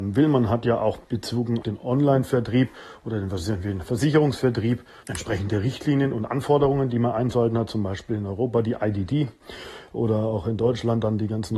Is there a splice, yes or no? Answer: yes